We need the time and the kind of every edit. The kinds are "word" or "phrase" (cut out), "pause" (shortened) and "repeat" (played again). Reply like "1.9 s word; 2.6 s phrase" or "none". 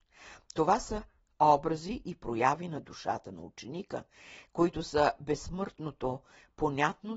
none